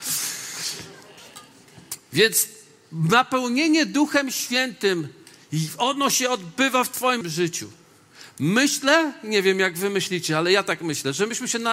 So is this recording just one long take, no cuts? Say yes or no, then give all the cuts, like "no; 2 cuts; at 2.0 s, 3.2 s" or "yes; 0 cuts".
no; 1 cut; at 7.2 s